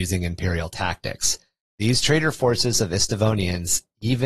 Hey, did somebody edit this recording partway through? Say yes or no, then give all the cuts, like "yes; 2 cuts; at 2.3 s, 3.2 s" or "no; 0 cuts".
no; 0 cuts